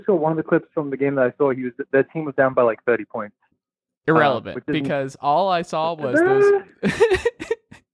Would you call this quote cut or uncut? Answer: uncut